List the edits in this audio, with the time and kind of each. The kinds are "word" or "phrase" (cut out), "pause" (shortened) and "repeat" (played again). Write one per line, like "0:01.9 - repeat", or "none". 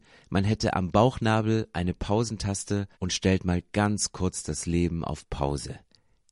0:02.9 - pause